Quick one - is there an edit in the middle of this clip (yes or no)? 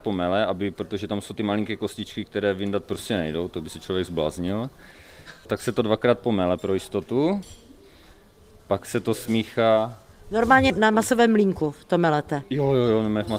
no